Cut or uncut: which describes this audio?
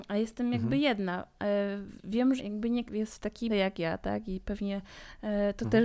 cut